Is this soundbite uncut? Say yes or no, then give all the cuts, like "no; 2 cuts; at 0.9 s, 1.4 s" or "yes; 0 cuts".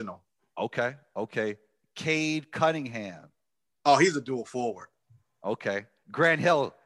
yes; 0 cuts